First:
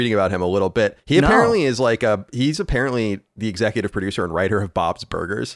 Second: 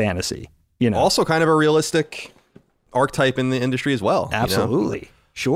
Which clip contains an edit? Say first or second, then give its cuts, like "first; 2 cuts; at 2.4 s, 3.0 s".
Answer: first; 1 cut; at 1.0 s